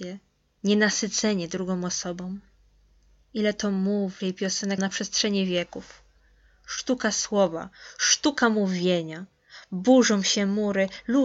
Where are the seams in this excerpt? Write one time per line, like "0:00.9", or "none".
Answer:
0:04.2
0:04.8